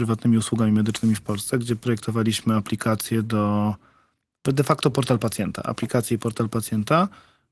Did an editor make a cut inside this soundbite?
no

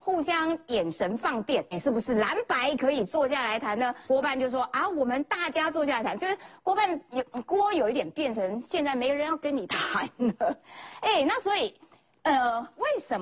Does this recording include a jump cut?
yes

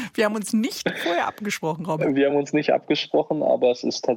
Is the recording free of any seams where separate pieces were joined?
yes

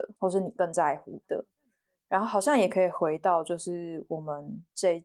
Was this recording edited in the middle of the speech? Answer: no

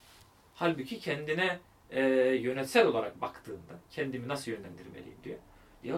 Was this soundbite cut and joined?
no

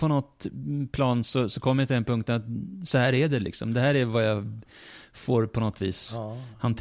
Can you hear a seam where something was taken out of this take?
no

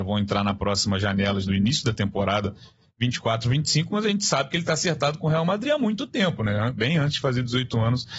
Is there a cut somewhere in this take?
yes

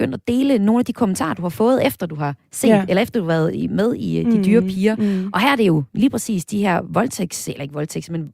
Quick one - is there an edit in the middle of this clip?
no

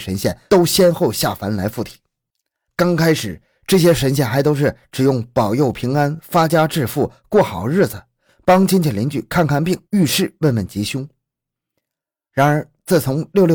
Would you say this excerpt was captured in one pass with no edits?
yes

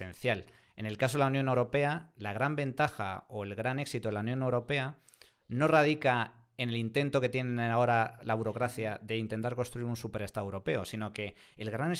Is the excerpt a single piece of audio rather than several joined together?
yes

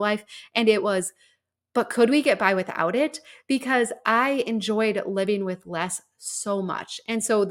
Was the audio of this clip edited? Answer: no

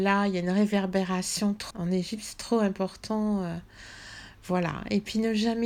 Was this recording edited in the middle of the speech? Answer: yes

